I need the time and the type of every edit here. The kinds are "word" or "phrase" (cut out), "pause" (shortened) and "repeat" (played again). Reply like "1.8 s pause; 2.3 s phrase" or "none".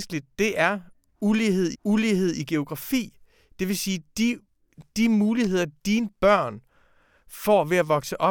1.7 s repeat